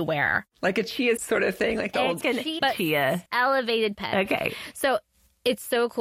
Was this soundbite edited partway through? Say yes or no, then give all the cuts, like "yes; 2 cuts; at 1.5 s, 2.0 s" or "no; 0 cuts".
yes; 5 cuts; at 1.2 s, 2.2 s, 2.6 s, 3.3 s, 3.9 s